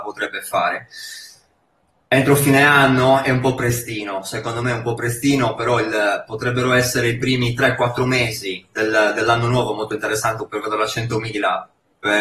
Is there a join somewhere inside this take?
no; 0 cuts

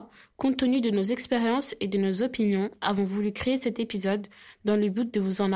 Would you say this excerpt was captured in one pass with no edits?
yes; 0 cuts

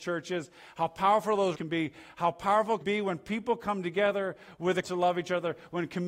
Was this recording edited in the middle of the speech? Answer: yes; 3 cuts; at 1.5 s, 2.8 s, 4.8 s

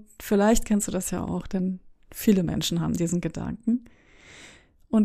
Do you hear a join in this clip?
no; 0 cuts

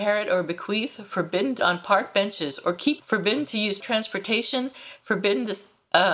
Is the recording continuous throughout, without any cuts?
no; 3 cuts; at 1.6 s, 3.0 s, 3.8 s

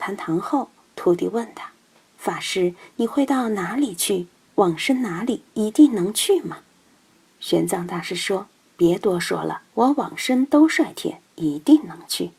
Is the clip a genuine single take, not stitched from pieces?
no; 3 cuts; at 5.5 s, 9.7 s, 11.3 s

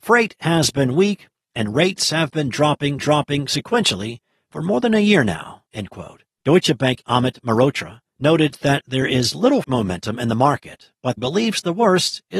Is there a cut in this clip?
yes; 7 cuts; at 3.0 s, 5.7 s, 6.3 s, 7.0 s, 8.1 s, 9.6 s, 11.2 s

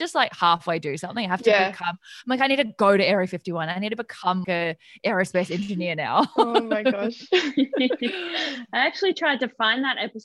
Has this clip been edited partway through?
yes; 1 cut; at 4.4 s

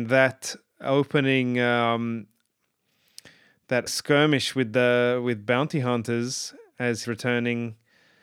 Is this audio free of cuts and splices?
no; 2 cuts; at 3.9 s, 7.0 s

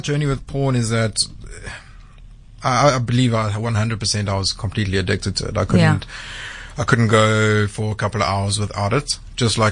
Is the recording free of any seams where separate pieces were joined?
yes; 0 cuts

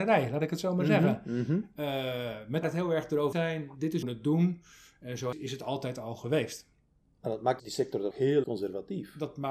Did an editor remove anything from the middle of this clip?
yes; 7 cuts; at 2.6 s, 3.3 s, 4.0 s, 5.3 s, 7.6 s, 8.1 s, 8.4 s

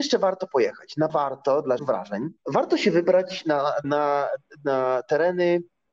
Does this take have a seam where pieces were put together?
yes; 4 cuts; at 1.1 s, 1.8 s, 2.4 s, 3.8 s

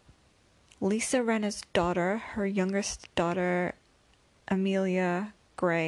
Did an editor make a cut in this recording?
no; 0 cuts

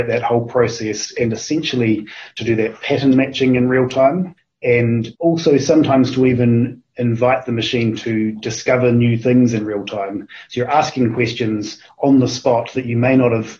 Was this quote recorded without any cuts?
no; 1 cut; at 5.1 s

